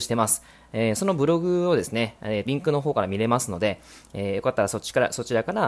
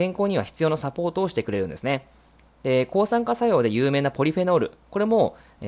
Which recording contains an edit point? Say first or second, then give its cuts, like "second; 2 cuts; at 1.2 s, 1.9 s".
first; 1 cut; at 2.5 s